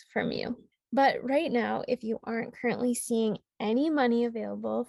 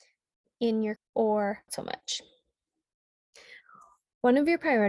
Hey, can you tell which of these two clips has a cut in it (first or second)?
second